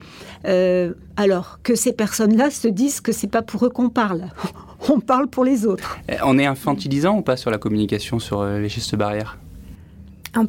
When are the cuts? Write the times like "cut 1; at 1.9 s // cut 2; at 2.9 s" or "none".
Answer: none